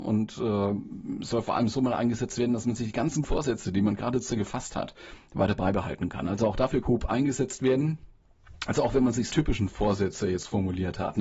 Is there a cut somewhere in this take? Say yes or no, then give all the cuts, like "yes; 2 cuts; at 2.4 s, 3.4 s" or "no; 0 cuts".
yes; 4 cuts; at 3.2 s, 4.3 s, 6.8 s, 9.3 s